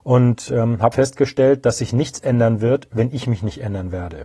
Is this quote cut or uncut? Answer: cut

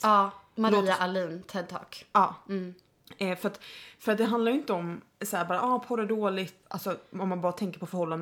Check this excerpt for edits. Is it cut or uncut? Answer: uncut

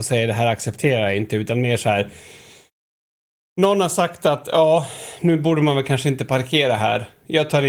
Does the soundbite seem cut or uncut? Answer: uncut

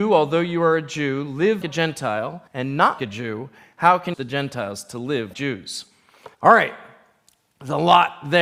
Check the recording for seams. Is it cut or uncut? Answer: cut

